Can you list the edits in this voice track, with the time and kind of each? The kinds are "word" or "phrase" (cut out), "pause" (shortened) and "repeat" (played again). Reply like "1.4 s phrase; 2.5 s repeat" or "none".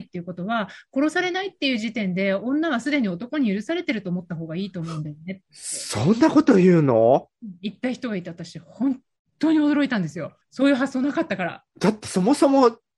10.4 s pause; 11.7 s pause